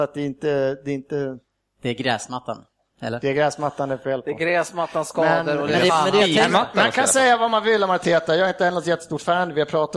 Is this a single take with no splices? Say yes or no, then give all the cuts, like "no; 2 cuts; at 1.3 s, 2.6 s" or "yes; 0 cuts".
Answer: yes; 0 cuts